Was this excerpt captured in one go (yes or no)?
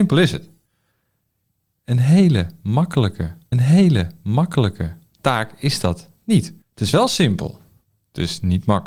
no